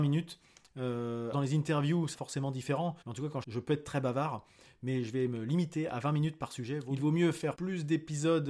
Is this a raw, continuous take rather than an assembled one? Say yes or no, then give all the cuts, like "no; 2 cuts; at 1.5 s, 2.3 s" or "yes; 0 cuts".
no; 4 cuts; at 1.3 s, 2.1 s, 3.0 s, 3.4 s